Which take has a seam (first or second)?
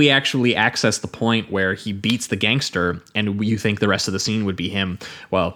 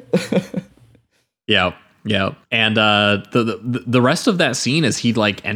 second